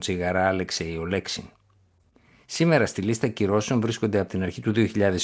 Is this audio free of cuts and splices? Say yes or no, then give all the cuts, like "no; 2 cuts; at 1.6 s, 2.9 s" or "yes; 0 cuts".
yes; 0 cuts